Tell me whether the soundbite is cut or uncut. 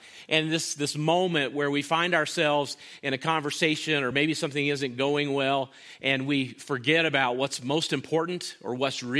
uncut